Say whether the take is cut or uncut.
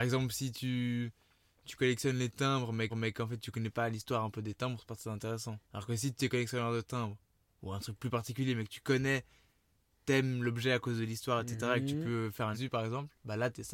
cut